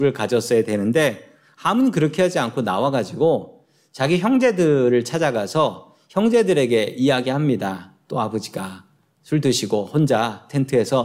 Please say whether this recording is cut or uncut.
uncut